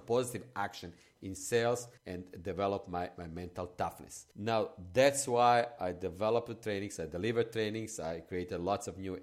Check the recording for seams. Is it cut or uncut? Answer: cut